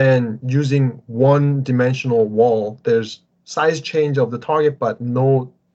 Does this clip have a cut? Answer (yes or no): no